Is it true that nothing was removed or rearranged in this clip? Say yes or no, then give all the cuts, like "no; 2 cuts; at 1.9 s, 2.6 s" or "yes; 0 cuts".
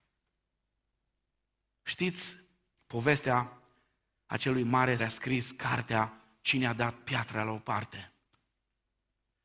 no; 1 cut; at 5.0 s